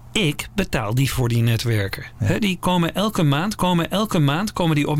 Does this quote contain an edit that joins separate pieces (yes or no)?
yes